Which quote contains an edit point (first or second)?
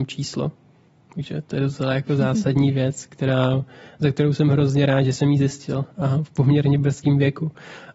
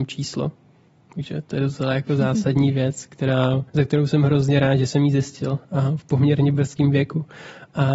second